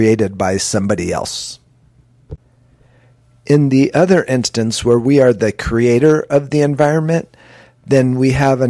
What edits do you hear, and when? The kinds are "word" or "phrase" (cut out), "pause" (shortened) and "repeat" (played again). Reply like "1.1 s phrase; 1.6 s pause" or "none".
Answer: none